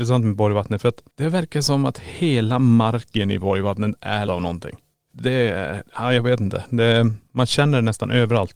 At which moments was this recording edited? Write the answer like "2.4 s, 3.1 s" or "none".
1.1 s, 4.3 s, 5.1 s